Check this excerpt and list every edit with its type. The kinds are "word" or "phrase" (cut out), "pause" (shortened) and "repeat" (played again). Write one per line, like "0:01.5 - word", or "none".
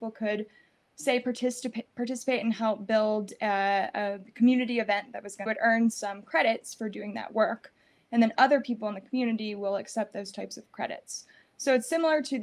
0:05.5 - phrase